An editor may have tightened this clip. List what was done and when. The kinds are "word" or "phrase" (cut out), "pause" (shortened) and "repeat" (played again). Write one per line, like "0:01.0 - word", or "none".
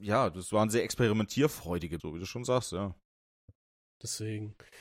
0:02.0 - word